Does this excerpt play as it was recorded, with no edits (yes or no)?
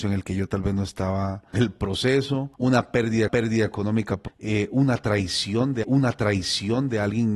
no